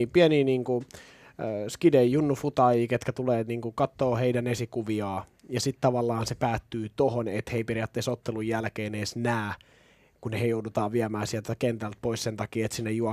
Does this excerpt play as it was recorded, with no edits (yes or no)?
yes